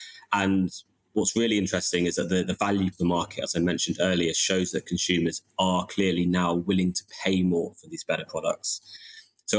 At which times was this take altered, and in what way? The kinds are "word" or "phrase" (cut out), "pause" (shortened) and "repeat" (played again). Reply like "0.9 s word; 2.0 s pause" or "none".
2.9 s word